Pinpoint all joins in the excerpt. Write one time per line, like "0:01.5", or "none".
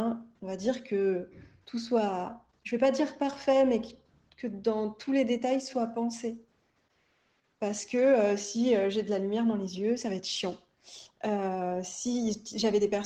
none

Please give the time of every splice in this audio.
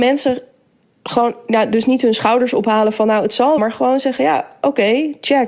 0:03.6

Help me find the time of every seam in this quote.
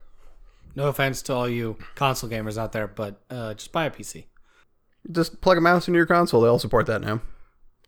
none

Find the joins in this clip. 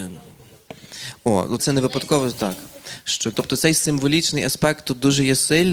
0:01.6
0:03.3

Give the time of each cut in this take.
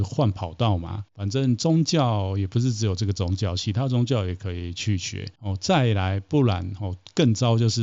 0:05.4

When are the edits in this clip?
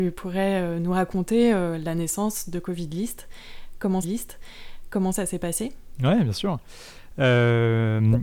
0:04.0

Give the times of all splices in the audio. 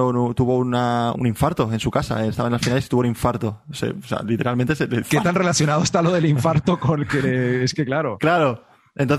0:01.1
0:05.0

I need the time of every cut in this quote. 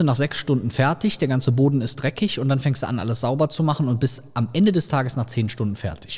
none

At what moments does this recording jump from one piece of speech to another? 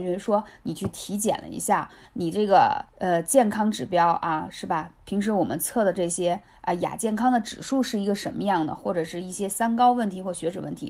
0:02.9

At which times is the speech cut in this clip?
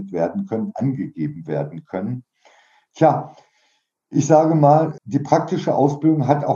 0:05.0

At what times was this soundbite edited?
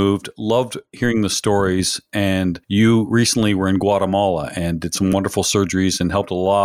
none

